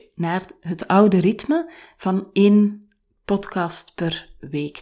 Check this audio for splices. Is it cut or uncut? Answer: uncut